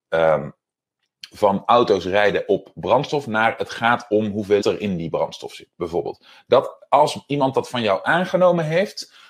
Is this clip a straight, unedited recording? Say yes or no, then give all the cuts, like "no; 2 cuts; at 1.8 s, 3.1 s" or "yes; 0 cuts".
no; 1 cut; at 4.6 s